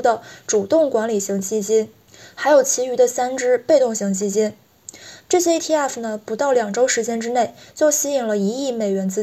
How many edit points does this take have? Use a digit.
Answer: 0